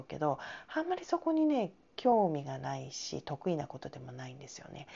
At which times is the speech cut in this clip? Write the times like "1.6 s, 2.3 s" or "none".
none